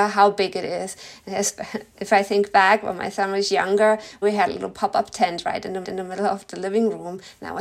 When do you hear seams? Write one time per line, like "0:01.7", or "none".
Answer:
0:04.2
0:05.8